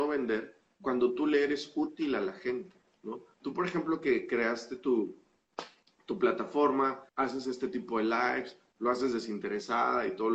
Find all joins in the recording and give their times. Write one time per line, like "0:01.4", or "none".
0:02.9
0:07.1